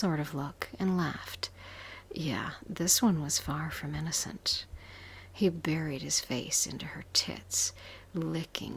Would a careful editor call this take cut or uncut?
uncut